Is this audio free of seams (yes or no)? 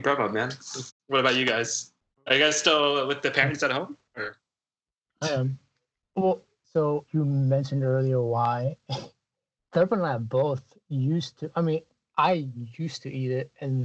yes